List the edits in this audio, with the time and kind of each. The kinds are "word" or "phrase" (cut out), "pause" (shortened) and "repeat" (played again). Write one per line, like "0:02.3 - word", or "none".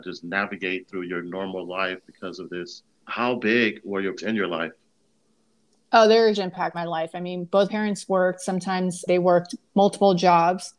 0:03.0 - word
0:04.2 - word
0:06.3 - word
0:06.7 - word
0:07.7 - word
0:09.1 - word